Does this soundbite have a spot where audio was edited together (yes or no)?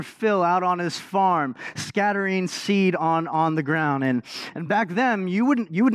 no